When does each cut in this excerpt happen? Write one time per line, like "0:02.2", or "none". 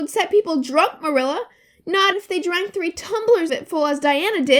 0:02.1
0:03.5